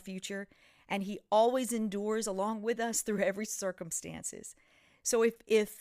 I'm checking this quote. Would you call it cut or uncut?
uncut